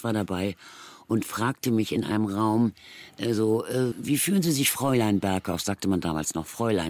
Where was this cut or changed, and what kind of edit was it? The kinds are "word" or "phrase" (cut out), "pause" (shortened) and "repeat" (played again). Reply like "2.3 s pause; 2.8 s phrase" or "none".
3.9 s word